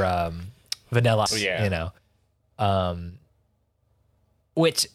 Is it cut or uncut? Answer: cut